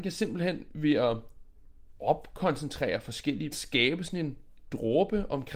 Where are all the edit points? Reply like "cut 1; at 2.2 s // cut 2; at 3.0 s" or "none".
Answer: cut 1; at 3.5 s